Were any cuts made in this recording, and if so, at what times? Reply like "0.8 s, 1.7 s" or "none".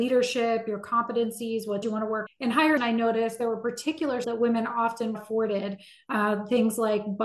1.8 s, 2.3 s, 2.8 s, 4.2 s, 5.1 s